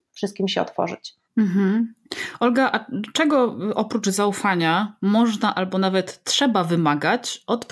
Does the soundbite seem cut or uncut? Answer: cut